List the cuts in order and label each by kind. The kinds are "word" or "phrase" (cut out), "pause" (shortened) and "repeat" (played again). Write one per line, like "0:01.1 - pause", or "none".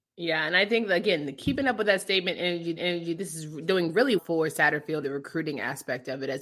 0:02.8 - repeat
0:04.2 - word
0:05.0 - word